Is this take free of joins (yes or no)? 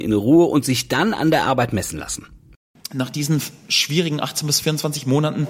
yes